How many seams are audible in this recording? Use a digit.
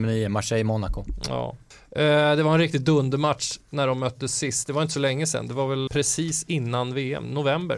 1